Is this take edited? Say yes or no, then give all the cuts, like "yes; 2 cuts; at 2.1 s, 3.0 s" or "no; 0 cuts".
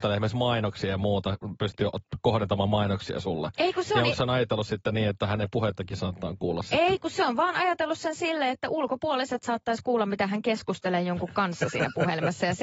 no; 0 cuts